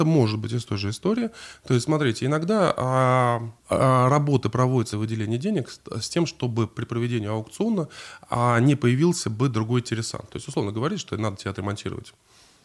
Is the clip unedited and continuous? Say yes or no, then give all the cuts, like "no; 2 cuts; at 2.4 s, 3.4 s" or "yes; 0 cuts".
no; 2 cuts; at 3.6 s, 4.9 s